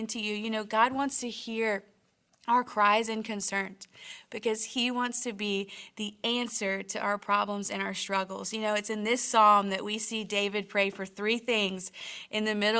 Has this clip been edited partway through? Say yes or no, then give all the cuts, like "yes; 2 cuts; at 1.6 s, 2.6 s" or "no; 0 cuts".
no; 0 cuts